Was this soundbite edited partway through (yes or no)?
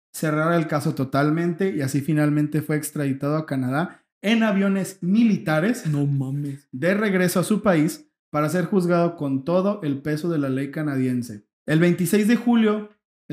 yes